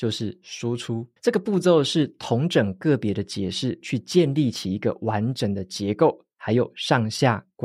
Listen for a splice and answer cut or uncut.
cut